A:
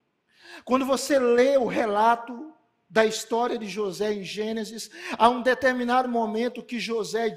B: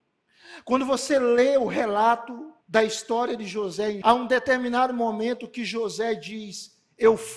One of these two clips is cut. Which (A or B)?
B